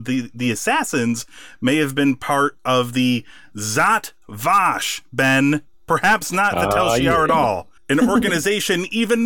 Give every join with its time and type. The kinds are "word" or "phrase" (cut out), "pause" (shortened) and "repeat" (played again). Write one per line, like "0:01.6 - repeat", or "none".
0:07.8 - pause